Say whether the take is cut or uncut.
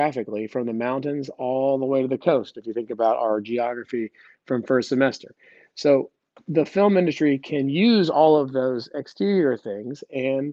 uncut